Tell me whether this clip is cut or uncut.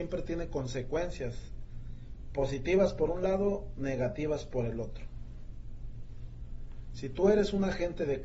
uncut